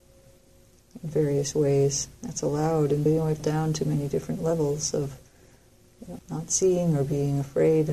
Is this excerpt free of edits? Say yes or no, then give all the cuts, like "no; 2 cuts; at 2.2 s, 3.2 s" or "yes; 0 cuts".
no; 3 cuts; at 3.1 s, 3.4 s, 6.2 s